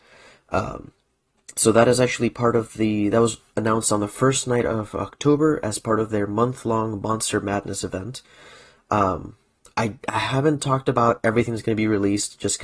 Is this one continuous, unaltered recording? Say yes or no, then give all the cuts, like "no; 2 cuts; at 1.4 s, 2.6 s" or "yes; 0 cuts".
yes; 0 cuts